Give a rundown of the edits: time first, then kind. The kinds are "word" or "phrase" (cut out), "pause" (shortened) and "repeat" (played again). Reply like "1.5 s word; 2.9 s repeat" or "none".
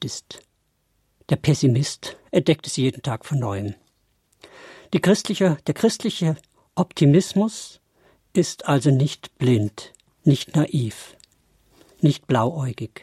none

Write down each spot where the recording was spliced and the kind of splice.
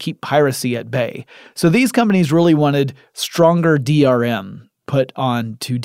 none

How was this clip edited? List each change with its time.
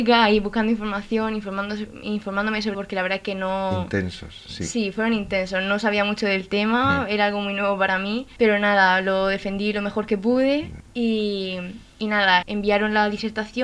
2.7 s phrase; 12.4 s word

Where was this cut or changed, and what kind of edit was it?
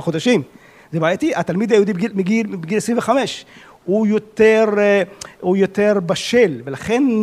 none

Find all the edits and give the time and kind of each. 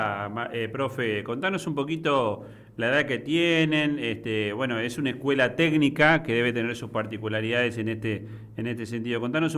none

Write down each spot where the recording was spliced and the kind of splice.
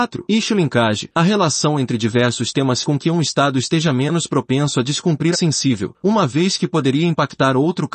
2.8 s word; 5.3 s phrase

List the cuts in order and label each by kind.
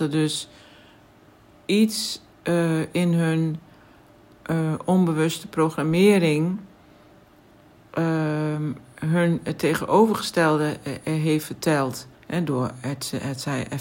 12.1 s pause

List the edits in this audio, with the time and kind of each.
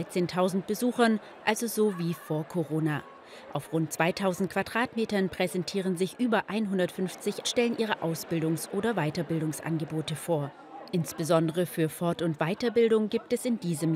7.4 s phrase

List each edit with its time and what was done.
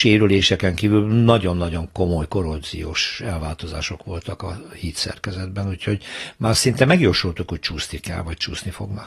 none

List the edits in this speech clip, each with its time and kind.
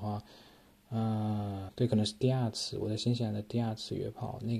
1.7 s word

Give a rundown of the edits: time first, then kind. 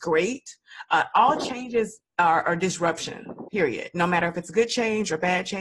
2.1 s pause

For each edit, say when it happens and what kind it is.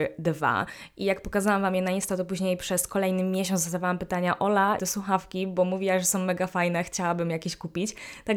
4.8 s phrase

